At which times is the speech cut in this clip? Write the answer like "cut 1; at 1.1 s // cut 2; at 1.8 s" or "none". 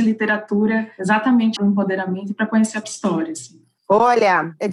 cut 1; at 1.6 s // cut 2; at 2.8 s

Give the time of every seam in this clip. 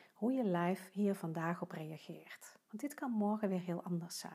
cut 1; at 2.7 s

